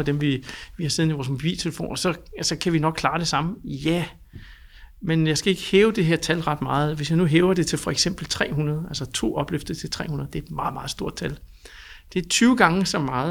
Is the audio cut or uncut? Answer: uncut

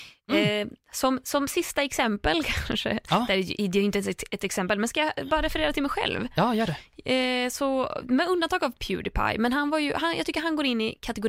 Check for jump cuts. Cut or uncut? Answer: uncut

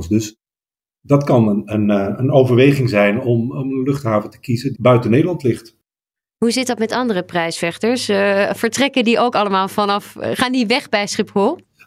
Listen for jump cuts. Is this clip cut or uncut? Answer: cut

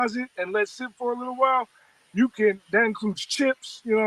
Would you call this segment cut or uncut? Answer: uncut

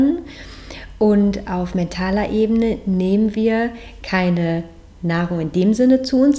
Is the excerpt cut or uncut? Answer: uncut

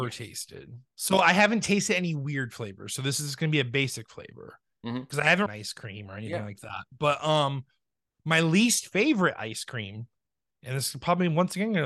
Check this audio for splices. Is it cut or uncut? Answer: cut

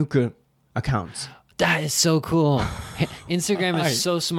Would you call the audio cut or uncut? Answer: uncut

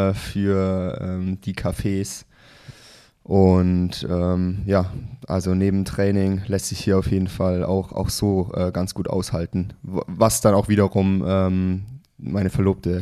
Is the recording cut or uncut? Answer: uncut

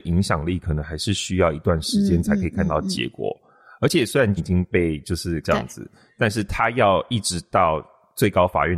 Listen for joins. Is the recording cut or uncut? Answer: cut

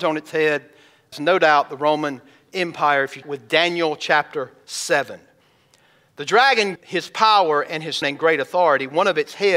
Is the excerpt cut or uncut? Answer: cut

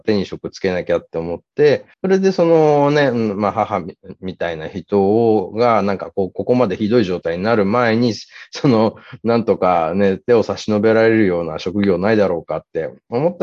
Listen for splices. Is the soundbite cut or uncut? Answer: cut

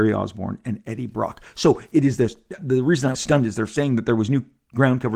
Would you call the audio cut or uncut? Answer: cut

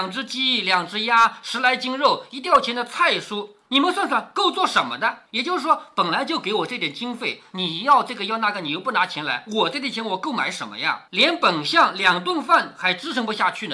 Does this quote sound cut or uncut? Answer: cut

